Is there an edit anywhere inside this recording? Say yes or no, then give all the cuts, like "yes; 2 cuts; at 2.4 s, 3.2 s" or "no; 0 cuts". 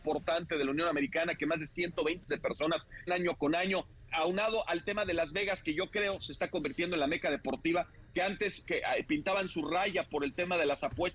yes; 4 cuts; at 2.3 s, 3.1 s, 4.1 s, 8.6 s